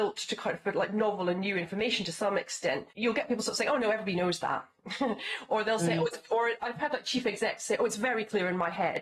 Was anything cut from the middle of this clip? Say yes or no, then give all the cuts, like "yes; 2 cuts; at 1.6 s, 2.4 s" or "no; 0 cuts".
yes; 1 cut; at 2.9 s